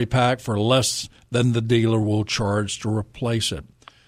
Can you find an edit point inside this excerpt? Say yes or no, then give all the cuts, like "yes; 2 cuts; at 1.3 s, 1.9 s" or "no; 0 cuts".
no; 0 cuts